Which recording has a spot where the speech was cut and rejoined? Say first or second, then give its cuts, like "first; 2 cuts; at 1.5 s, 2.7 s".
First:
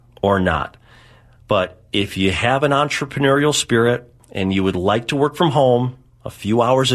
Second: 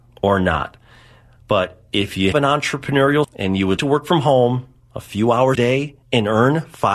second; 5 cuts; at 2.3 s, 3.2 s, 3.8 s, 5.5 s, 6.0 s